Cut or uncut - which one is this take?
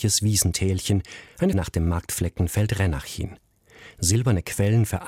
cut